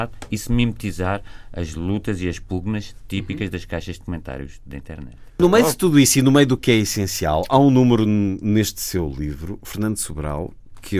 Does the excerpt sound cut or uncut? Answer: uncut